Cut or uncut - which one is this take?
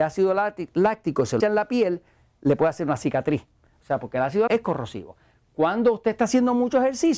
cut